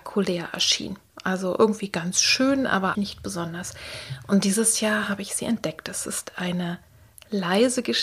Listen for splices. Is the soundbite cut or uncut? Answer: cut